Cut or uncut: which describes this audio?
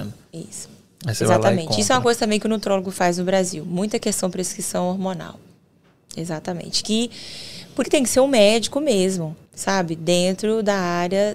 cut